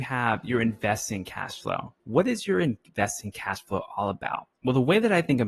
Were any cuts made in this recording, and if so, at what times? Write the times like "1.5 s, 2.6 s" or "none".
2.0 s, 4.6 s